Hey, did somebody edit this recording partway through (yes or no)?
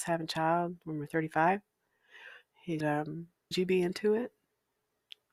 yes